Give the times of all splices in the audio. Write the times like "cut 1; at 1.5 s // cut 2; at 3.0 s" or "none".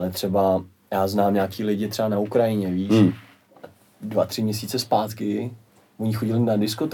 none

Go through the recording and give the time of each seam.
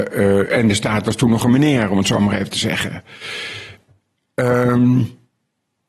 none

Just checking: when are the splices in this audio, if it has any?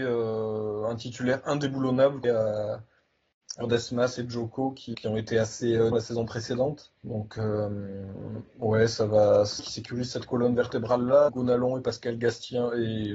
cut 1; at 2.2 s // cut 2; at 3.6 s // cut 3; at 4.9 s // cut 4; at 5.9 s // cut 5; at 7.0 s // cut 6; at 9.6 s // cut 7; at 11.3 s

